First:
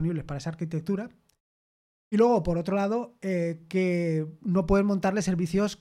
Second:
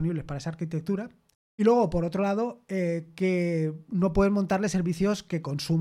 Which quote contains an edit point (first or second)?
second